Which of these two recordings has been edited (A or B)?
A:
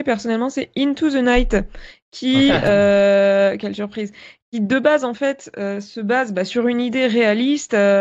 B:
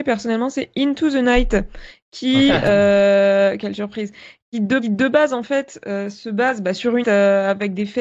B